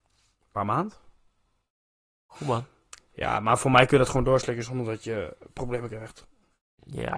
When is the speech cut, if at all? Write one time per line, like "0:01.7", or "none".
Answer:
none